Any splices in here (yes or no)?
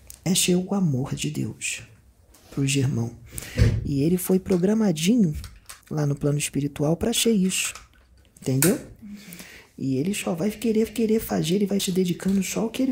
yes